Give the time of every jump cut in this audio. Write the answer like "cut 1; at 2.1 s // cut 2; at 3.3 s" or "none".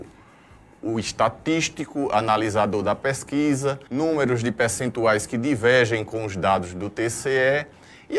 cut 1; at 3.9 s